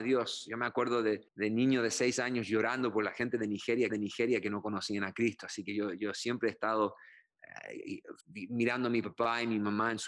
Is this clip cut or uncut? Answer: cut